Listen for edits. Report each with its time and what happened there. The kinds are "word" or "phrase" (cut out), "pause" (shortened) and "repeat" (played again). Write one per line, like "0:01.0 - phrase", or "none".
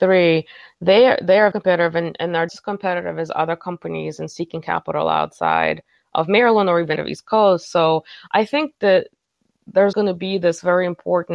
0:01.5 - word
0:02.5 - word
0:07.0 - word
0:09.9 - word